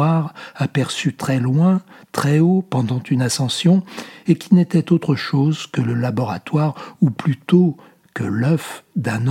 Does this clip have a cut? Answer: no; 0 cuts

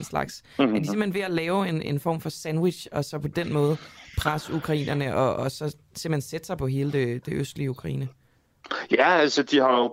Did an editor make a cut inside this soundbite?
no; 0 cuts

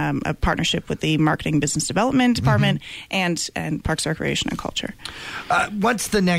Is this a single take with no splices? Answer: yes; 0 cuts

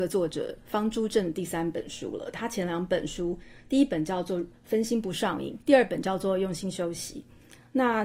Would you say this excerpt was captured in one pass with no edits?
no; 1 cut; at 5.6 s

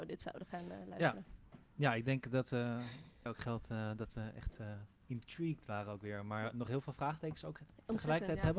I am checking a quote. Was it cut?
yes; 1 cut; at 3.3 s

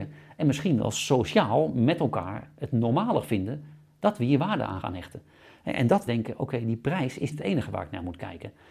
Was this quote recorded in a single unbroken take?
no; 3 cuts; at 4.8 s, 6.1 s, 7.3 s

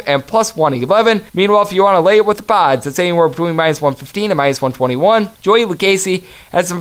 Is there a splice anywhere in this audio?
yes; 2 cuts; at 1.3 s, 5.3 s

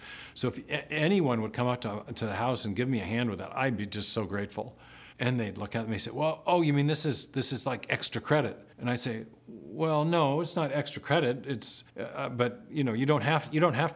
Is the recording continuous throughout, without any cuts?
no; 3 cuts; at 5.1 s, 8.7 s, 11.9 s

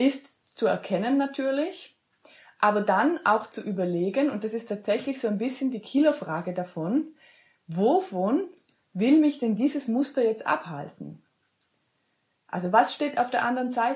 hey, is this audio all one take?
yes; 0 cuts

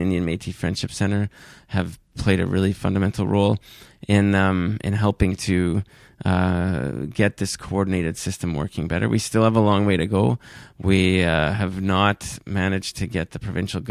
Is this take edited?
no; 0 cuts

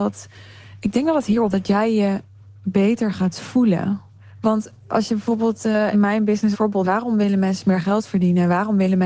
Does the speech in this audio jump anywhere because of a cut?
yes; 4 cuts; at 1.5 s, 5.9 s, 6.5 s, 6.8 s

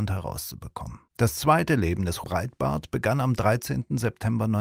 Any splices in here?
yes; 2 cuts; at 1.1 s, 2.2 s

